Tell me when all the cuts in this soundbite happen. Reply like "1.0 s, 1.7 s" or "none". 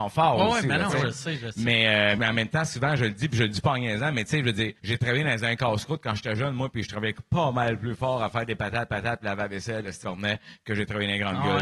2.2 s, 4.8 s, 8.9 s, 10.0 s